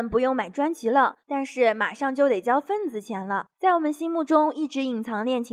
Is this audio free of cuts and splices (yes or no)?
no